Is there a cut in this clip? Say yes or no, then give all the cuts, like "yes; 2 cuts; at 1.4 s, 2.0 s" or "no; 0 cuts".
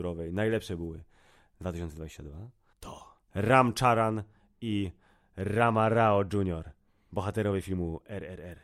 no; 0 cuts